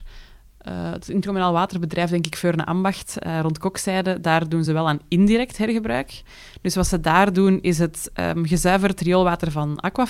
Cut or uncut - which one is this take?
uncut